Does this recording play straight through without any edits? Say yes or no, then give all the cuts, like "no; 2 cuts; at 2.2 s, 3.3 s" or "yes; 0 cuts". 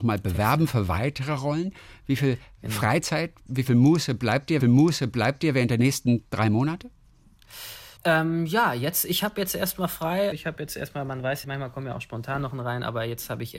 no; 5 cuts; at 4.6 s, 8.0 s, 10.3 s, 11.4 s, 12.5 s